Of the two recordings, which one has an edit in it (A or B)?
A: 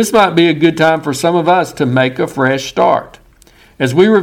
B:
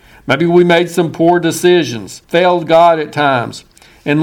B